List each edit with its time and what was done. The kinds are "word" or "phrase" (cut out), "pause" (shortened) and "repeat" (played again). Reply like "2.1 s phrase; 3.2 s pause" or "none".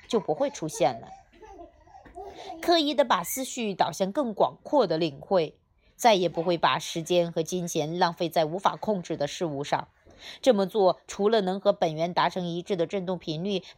none